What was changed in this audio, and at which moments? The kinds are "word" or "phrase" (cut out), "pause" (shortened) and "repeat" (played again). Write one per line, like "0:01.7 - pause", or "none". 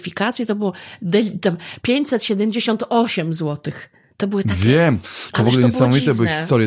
none